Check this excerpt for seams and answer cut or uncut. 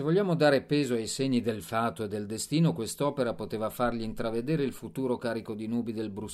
uncut